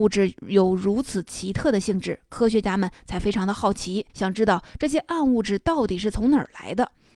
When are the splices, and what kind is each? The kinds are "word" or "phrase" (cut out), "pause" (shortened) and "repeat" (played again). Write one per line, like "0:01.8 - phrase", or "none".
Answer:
0:04.1 - pause